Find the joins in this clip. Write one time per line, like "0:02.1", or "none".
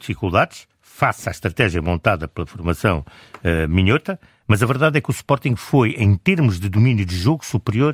none